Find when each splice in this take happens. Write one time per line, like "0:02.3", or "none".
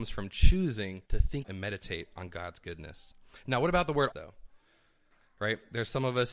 0:01.1
0:01.4
0:04.1